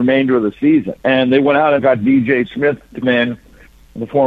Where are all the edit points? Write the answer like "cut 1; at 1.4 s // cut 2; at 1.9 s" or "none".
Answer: cut 1; at 1.0 s // cut 2; at 1.8 s // cut 3; at 3.0 s